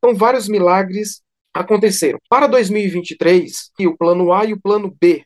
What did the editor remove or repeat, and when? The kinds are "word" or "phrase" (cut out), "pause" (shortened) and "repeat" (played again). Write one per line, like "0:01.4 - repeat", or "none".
0:03.8 - phrase